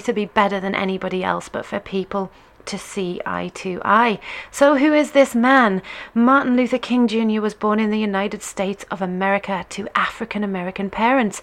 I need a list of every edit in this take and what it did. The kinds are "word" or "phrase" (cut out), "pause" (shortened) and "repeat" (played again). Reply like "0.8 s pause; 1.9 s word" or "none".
none